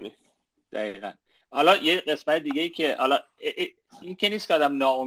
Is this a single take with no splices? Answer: yes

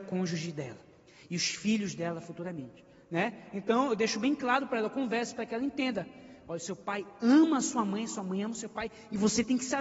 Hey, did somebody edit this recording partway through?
no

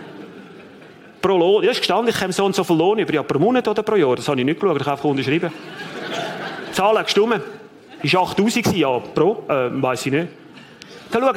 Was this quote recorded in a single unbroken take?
yes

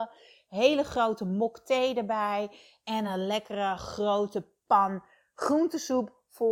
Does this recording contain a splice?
no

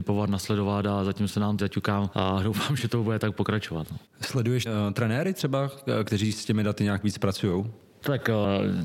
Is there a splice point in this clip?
yes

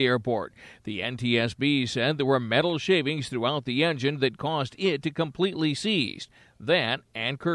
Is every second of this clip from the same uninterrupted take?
yes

